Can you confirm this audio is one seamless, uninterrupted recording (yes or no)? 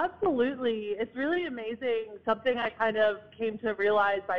yes